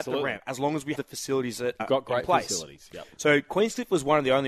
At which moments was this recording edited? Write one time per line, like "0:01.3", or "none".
0:00.9
0:01.8

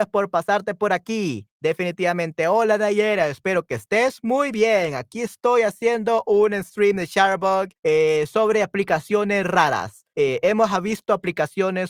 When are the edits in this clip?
0:01.5
0:07.8
0:10.1

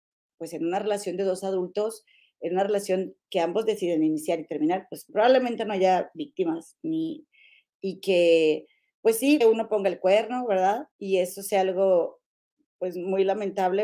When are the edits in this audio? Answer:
0:05.1
0:09.4
0:10.9

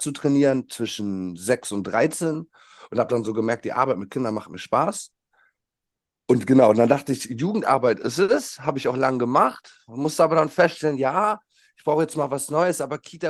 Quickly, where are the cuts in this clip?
none

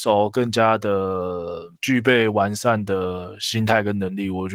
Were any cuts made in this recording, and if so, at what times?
0:01.8

